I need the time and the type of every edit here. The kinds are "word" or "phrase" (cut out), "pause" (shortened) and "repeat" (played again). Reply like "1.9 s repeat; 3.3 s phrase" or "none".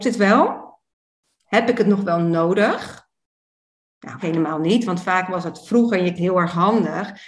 4.2 s word; 6.2 s word